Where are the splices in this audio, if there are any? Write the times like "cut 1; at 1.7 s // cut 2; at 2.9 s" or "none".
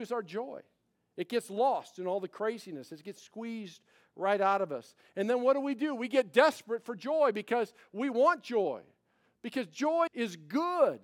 cut 1; at 10.1 s